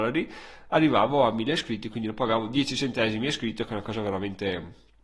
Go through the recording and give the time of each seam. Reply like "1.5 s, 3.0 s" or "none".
none